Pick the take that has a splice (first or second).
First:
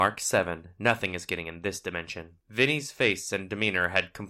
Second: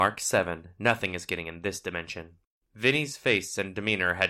first